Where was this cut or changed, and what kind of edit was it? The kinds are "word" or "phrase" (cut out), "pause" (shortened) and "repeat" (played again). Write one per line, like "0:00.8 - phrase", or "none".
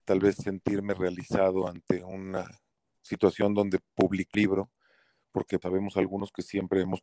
0:04.3 - word
0:05.6 - word